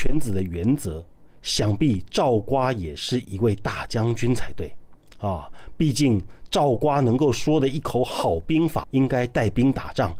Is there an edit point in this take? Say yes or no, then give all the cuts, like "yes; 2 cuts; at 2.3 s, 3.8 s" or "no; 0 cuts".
yes; 1 cut; at 8.8 s